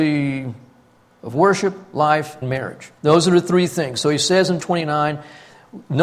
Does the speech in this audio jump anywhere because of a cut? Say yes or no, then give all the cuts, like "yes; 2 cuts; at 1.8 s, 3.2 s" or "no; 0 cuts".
yes; 3 cuts; at 2.4 s, 3.0 s, 4.6 s